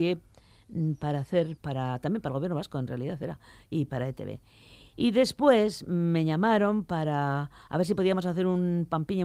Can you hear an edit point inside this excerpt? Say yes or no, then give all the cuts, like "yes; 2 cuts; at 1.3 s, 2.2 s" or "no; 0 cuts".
yes; 1 cut; at 1.6 s